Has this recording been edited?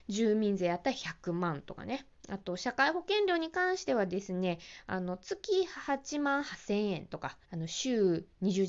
yes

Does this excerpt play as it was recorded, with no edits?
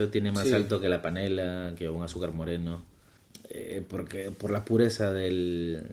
yes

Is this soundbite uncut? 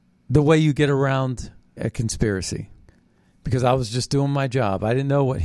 no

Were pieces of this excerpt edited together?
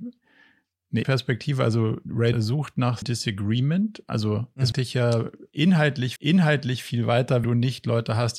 yes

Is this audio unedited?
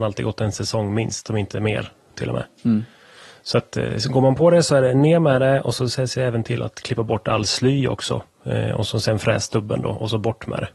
yes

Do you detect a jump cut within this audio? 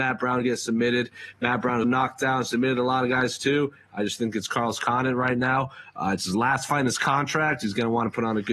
yes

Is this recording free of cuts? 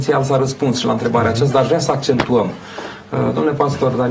yes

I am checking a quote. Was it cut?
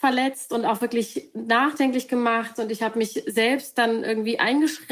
no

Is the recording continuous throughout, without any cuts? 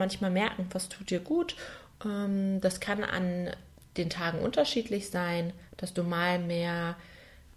yes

